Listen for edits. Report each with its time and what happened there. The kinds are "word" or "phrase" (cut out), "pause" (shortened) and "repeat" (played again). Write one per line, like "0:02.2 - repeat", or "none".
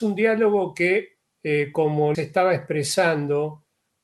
0:01.2 - pause
0:02.1 - word